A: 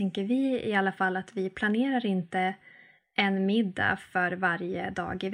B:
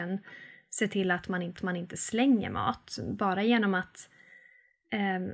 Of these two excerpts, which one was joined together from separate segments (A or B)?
B